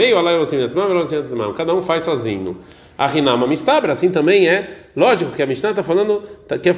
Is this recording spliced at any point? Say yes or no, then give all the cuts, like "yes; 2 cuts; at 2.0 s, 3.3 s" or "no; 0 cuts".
no; 0 cuts